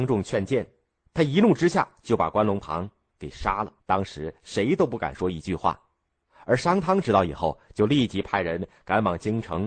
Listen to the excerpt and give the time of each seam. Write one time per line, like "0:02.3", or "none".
0:03.8